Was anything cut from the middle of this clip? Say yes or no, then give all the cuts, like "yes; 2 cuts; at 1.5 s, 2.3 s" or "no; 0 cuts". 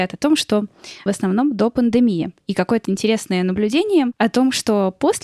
yes; 2 cuts; at 1.1 s, 2.8 s